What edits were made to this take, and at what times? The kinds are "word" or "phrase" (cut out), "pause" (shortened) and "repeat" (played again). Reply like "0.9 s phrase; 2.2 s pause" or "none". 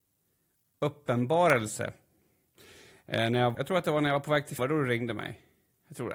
3.5 s word; 4.6 s word